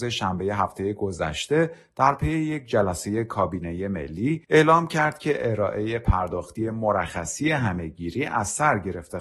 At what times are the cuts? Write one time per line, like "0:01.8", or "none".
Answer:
0:04.4